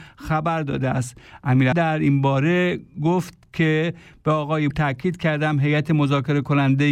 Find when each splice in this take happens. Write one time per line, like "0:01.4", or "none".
0:01.7
0:02.9
0:04.7